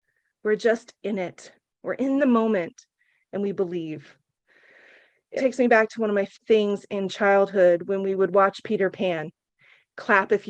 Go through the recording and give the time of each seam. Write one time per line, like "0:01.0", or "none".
0:05.4
0:06.3